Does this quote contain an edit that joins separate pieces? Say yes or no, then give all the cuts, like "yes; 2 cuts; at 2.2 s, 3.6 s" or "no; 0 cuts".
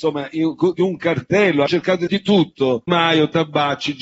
yes; 3 cuts; at 1.7 s, 2.1 s, 2.9 s